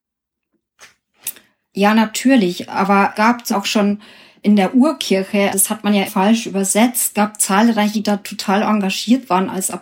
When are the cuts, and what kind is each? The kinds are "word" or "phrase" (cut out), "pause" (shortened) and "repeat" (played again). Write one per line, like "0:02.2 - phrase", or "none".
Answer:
0:03.1 - word
0:03.5 - word
0:05.5 - word
0:06.1 - word
0:07.1 - word
0:07.9 - word